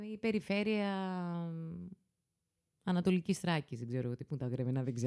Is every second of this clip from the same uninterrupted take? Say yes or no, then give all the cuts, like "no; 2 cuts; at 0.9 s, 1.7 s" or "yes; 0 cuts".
yes; 0 cuts